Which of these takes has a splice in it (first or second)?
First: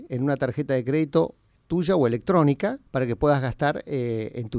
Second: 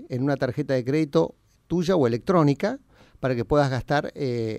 first